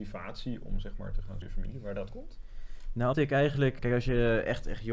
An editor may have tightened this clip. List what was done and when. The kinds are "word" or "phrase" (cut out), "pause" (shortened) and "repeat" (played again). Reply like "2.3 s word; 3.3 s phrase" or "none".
1.4 s phrase; 2.1 s word; 3.1 s word; 3.8 s word

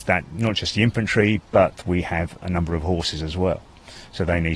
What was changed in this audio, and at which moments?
1.8 s phrase

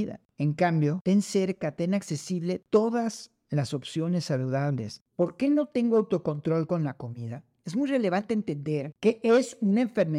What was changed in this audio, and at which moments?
none

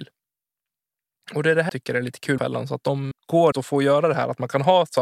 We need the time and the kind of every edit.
1.7 s word; 2.4 s word; 3.1 s word; 3.5 s word

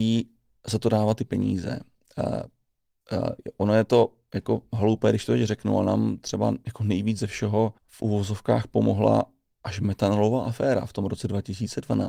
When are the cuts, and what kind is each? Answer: 7.8 s pause

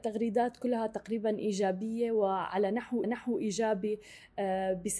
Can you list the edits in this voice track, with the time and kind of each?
3.0 s repeat

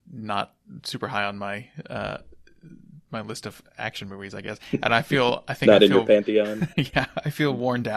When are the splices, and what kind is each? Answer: 3.0 s pause

